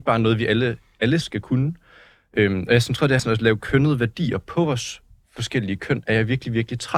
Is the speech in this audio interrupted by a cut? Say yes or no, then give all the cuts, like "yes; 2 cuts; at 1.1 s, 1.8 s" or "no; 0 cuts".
yes; 2 cuts; at 1.2 s, 3.2 s